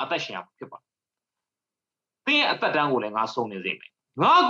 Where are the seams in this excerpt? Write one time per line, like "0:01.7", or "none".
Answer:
none